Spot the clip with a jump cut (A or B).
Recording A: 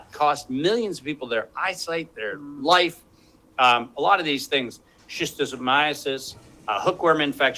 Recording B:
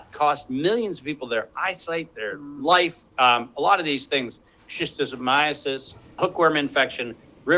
B